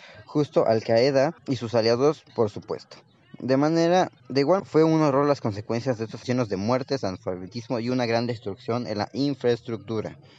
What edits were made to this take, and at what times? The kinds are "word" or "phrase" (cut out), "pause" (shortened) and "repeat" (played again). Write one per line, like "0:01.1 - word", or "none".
0:01.4 - pause
0:02.3 - pause
0:04.2 - pause
0:04.6 - word
0:06.2 - word